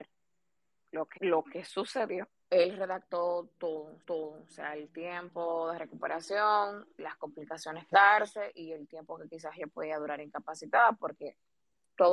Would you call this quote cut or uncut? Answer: cut